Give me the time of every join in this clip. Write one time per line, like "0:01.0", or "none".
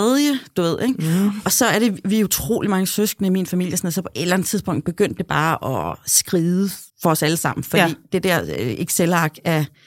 0:06.9